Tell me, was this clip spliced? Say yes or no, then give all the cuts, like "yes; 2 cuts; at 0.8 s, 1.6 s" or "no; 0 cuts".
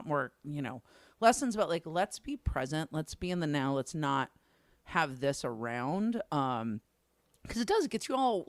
no; 0 cuts